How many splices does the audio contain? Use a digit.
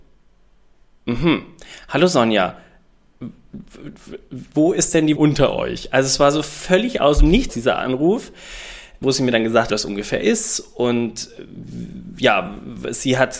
4